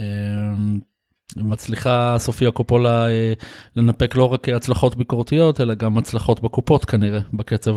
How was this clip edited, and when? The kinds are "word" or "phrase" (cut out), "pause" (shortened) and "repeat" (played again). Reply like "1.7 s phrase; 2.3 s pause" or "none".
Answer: none